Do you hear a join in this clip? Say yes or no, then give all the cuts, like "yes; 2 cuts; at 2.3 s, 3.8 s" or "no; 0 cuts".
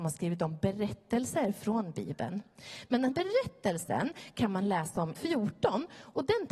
yes; 2 cuts; at 3.1 s, 5.1 s